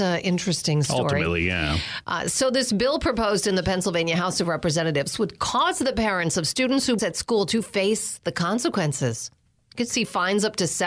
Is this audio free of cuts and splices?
no; 1 cut; at 7.0 s

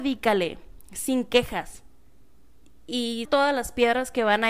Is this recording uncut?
no; 1 cut; at 3.2 s

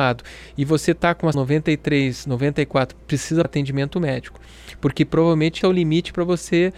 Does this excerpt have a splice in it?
yes; 4 cuts; at 1.3 s, 3.0 s, 3.4 s, 5.6 s

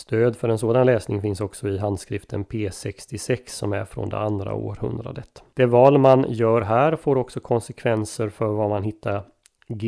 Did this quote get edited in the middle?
yes; 1 cut; at 5.5 s

